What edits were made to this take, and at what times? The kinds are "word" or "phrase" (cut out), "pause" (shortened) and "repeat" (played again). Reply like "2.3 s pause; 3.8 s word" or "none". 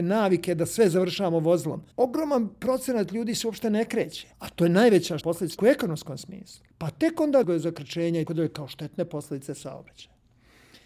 1.9 s pause; 4.3 s pause; 5.2 s word; 5.6 s word; 6.7 s pause; 7.4 s phrase; 8.3 s word